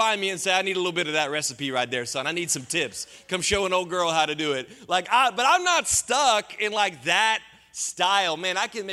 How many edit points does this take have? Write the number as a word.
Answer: one